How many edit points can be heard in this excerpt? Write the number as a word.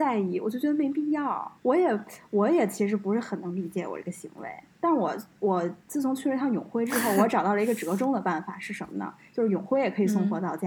two